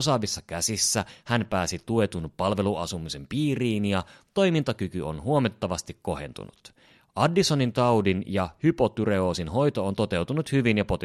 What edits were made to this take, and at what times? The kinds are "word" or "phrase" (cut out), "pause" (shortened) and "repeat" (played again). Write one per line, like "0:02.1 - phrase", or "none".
none